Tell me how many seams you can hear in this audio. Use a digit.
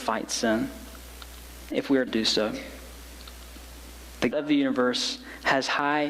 3